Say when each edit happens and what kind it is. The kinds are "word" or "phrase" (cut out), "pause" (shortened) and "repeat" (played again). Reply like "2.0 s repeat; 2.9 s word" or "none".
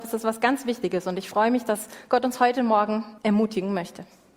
3.2 s pause